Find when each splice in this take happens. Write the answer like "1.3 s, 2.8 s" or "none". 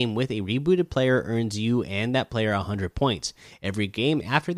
none